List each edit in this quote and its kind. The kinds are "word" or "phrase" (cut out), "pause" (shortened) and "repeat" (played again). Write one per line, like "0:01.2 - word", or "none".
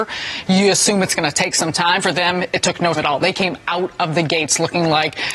0:02.9 - word

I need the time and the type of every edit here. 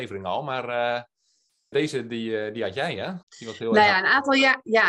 0:01.7 - word
0:03.2 - pause

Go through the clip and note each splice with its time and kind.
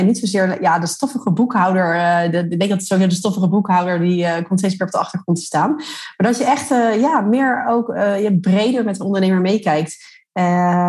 none

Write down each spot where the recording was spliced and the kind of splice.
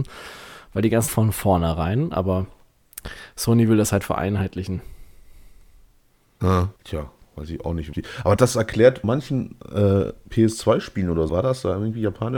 0:01.1 - phrase
0:06.8 - pause
0:07.9 - word
0:08.4 - word
0:09.0 - word
0:11.3 - word

